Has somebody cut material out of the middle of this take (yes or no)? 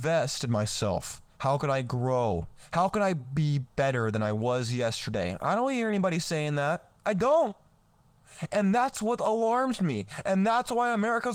yes